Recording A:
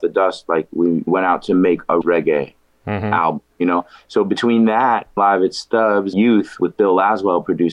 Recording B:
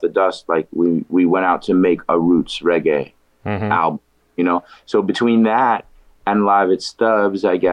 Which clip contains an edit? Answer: A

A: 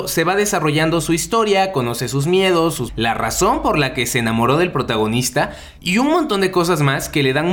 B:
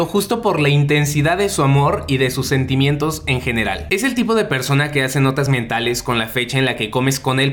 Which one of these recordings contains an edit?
A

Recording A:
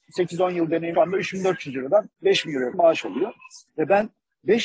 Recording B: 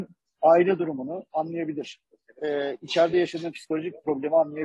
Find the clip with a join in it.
A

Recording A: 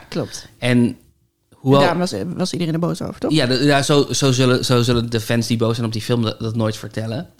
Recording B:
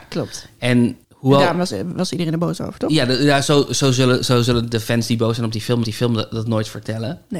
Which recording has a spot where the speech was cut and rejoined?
B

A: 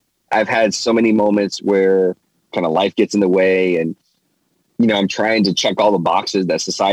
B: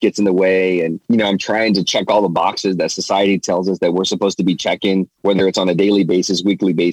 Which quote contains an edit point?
B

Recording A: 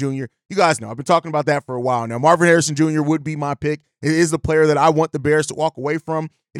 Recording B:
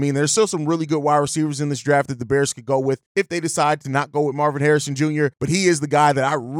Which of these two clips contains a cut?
B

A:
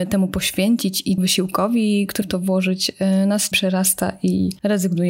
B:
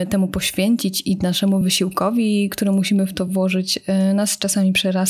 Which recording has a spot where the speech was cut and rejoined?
A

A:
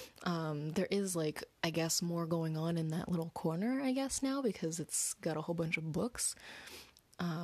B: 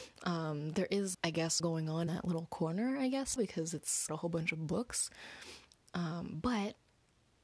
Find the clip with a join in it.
B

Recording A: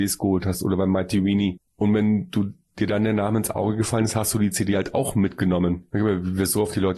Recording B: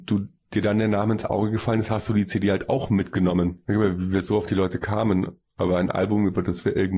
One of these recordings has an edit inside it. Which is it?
A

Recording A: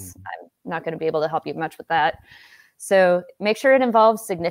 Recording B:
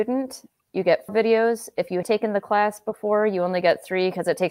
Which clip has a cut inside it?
B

